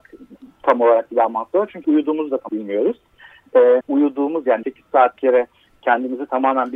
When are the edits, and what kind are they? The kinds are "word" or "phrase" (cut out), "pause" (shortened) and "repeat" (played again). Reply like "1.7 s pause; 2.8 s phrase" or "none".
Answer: 1.1 s word; 1.8 s word; 2.5 s word; 3.8 s word; 4.6 s word; 5.2 s word